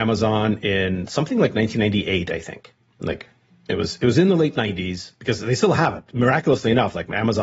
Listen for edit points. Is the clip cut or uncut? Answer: uncut